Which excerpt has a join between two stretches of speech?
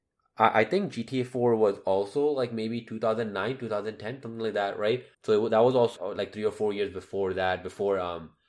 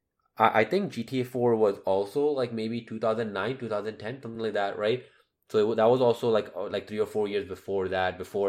first; 2 cuts; at 5.1 s, 6.0 s

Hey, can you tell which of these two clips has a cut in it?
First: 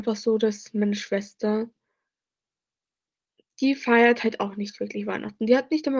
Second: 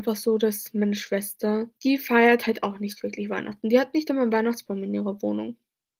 second; 1 cut; at 1.8 s

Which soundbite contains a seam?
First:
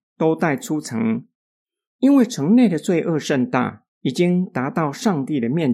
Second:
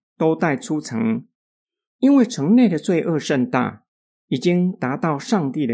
first; 1 cut; at 3.9 s

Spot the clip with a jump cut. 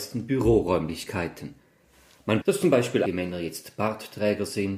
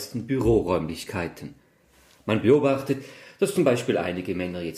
first; 2 cuts; at 2.4 s, 3.1 s

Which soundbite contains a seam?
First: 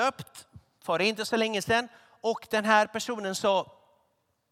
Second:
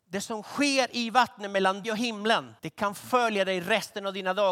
second; 2 cuts; at 1.8 s, 2.6 s

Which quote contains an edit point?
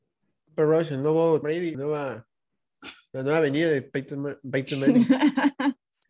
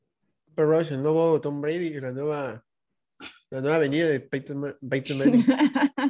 first; 2 cuts; at 1.4 s, 1.7 s

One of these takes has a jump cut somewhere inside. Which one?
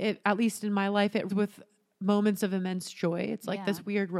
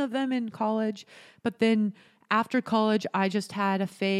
first; 1 cut; at 1.3 s

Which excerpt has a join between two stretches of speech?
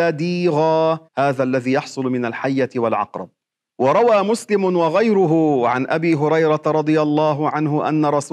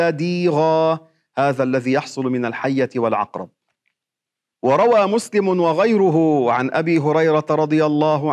first; 2 cuts; at 1.1 s, 3.4 s

